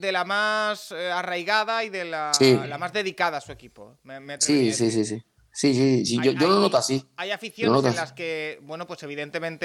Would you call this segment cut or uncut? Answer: uncut